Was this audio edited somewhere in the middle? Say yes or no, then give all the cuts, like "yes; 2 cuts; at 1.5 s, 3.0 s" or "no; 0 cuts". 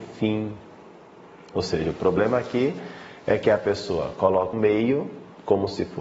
yes; 1 cut; at 4.5 s